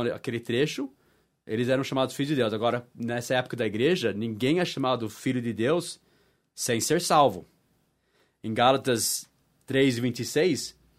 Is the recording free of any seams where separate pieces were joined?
yes; 0 cuts

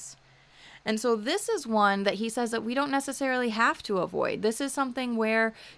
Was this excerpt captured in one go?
yes; 0 cuts

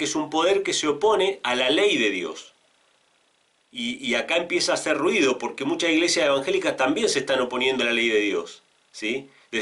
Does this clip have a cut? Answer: yes; 1 cut; at 7.8 s

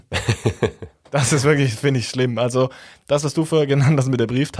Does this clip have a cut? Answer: no; 0 cuts

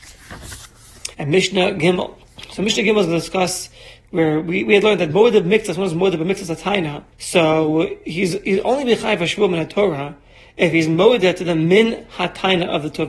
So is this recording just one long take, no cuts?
no; 2 cuts; at 1.1 s, 7.1 s

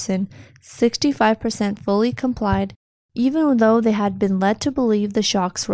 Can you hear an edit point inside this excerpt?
no; 0 cuts

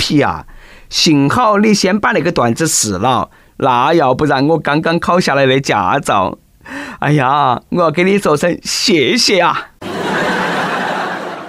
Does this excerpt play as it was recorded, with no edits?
yes; 0 cuts

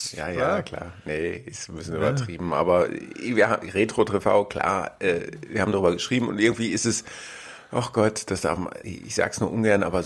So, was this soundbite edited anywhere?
yes; 1 cut; at 8.8 s

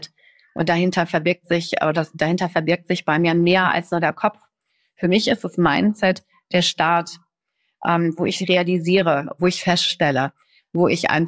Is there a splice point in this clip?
no; 0 cuts

